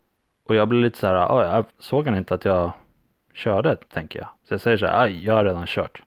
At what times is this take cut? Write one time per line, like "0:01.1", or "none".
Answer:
0:01.7
0:03.8
0:04.4